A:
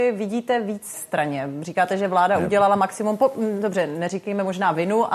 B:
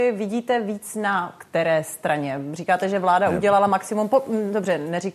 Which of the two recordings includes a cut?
A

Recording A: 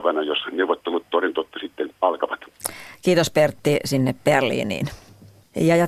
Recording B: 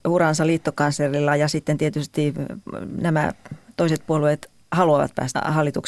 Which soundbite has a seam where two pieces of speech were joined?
A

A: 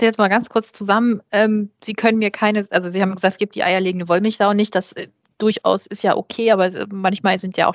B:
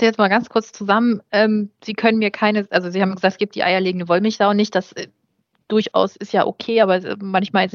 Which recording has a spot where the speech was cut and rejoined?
A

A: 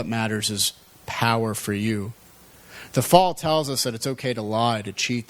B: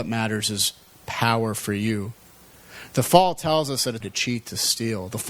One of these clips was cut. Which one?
B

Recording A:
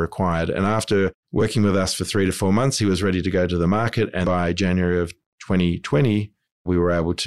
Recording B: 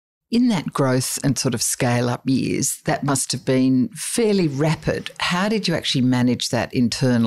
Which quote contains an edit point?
A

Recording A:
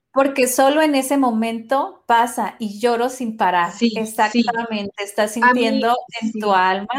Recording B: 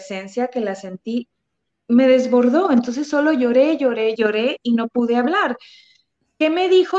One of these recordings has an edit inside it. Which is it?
B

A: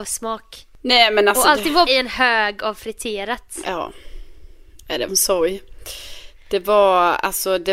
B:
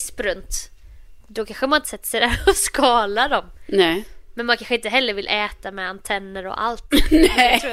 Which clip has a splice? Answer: A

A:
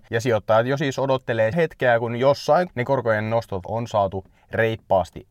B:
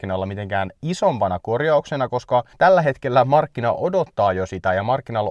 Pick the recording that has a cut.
A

